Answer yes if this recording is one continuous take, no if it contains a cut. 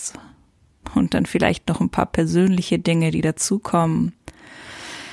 yes